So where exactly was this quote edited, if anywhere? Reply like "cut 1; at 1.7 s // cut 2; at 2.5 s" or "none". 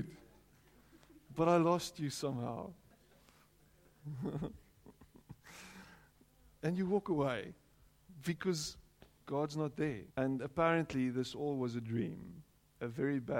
cut 1; at 2.9 s // cut 2; at 9.0 s // cut 3; at 10.1 s